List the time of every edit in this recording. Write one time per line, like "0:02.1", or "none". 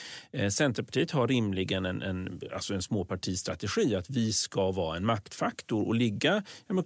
none